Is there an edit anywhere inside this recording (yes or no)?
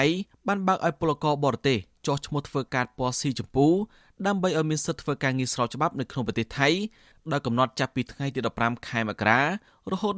no